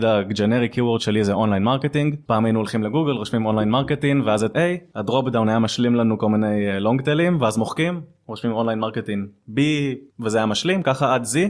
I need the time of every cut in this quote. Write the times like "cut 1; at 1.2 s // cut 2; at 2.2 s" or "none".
cut 1; at 4.5 s // cut 2; at 10.1 s